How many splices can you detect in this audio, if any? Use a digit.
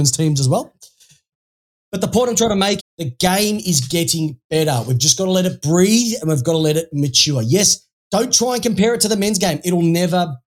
1